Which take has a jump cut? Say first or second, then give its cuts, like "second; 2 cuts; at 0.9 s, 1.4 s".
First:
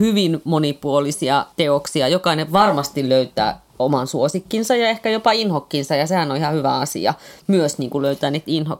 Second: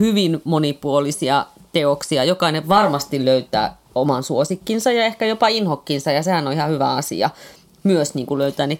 first; 2 cuts; at 1.5 s, 7.4 s